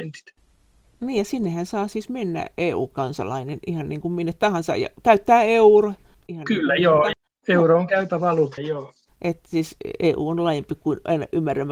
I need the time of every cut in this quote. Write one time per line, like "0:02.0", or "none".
0:08.6